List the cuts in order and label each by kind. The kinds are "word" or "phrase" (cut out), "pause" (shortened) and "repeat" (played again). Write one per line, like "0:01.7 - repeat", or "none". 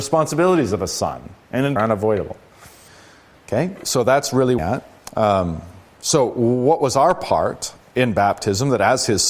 0:01.8 - phrase
0:02.9 - pause
0:04.6 - phrase
0:05.9 - pause